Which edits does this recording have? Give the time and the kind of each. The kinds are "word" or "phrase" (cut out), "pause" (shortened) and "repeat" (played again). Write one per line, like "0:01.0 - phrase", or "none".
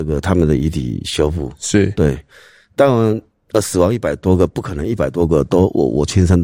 none

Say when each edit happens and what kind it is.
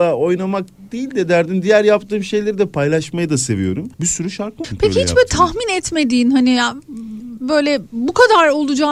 0:03.9 - pause
0:04.6 - word

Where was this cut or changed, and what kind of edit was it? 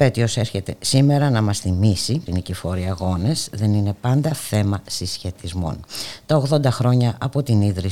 0:02.3 - word

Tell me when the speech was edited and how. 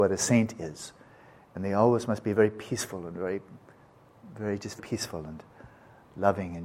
0:04.8 - word

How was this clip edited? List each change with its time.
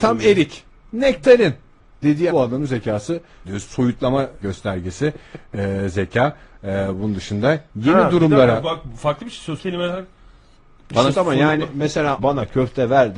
0:02.3 - word
0:03.4 - word
0:04.4 - word
0:09.6 - word
0:11.1 - word
0:12.2 - word

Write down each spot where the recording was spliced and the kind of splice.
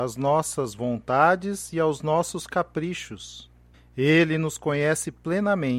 0:03.7 - pause

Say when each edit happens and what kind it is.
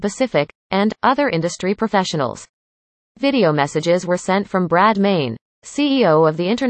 none

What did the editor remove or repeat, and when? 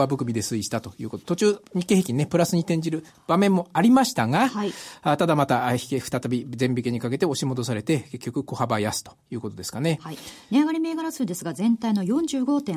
none

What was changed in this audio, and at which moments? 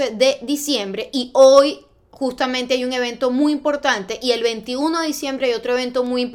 none

